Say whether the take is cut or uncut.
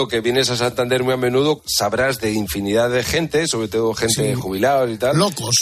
uncut